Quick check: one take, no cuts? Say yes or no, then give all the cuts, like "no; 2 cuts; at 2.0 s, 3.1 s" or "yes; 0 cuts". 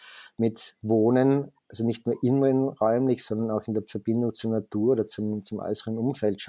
yes; 0 cuts